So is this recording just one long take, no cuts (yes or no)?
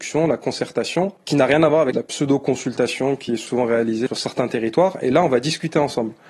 yes